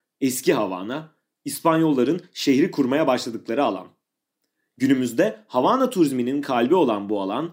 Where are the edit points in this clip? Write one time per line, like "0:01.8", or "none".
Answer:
none